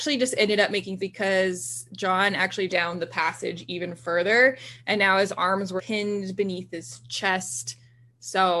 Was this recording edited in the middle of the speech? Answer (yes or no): yes